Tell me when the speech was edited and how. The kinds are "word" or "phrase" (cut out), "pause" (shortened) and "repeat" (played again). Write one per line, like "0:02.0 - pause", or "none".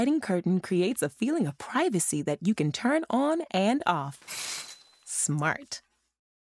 none